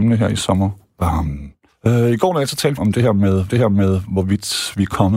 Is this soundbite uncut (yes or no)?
no